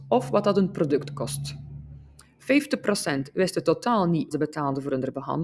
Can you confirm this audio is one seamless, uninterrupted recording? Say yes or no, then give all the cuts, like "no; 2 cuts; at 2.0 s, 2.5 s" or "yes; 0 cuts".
no; 1 cut; at 4.3 s